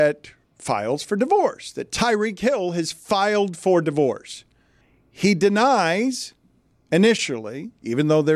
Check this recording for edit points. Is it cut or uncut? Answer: uncut